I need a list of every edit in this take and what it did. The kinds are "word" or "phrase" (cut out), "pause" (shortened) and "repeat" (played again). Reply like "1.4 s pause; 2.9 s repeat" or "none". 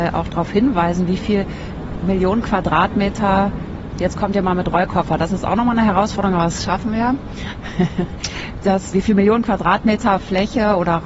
8.9 s word